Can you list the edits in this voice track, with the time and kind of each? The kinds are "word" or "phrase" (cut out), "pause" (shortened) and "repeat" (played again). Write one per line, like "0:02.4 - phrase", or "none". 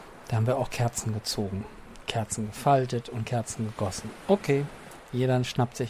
0:02.1 - word
0:05.0 - word